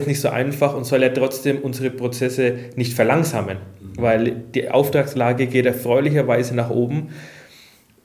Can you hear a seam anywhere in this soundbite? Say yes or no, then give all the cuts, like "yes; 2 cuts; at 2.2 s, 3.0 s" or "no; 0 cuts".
no; 0 cuts